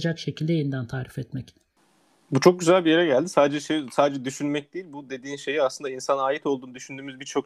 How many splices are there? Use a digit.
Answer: 0